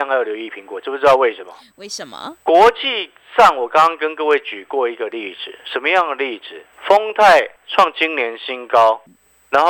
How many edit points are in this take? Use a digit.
3